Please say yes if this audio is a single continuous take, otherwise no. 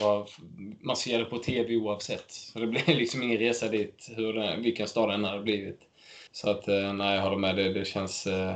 no